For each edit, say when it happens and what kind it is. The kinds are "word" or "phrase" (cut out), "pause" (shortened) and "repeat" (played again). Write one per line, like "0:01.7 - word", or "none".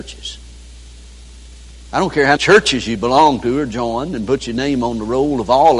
0:02.4 - word